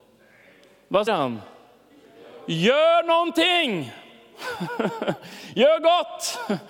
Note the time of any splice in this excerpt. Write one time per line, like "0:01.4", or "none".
0:01.1